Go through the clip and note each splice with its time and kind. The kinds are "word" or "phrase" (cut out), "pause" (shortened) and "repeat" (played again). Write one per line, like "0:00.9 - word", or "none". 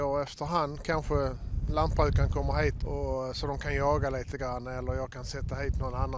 0:02.8 - word